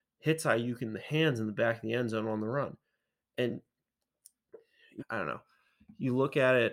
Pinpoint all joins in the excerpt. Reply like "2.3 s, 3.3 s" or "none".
5.0 s